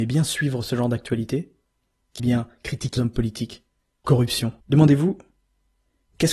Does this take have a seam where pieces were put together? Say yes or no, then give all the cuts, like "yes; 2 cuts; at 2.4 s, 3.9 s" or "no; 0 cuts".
yes; 4 cuts; at 2.2 s, 3.0 s, 4.0 s, 4.6 s